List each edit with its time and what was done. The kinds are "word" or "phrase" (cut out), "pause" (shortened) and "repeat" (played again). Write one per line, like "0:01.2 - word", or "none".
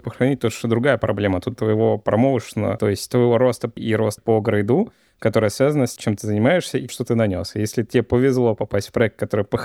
0:01.6 - word
0:03.8 - word
0:04.2 - word
0:06.0 - word
0:06.9 - word